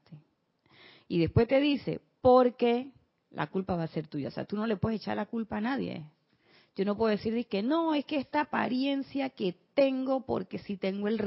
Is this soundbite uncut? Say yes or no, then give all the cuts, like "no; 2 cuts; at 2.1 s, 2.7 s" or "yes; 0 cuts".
yes; 0 cuts